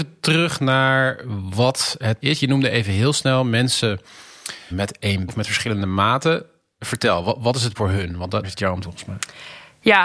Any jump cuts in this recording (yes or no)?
yes